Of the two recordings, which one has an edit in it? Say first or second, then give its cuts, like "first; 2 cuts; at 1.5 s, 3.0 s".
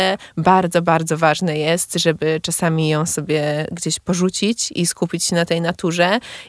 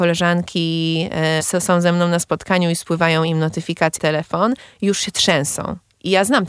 second; 2 cuts; at 1.4 s, 4.0 s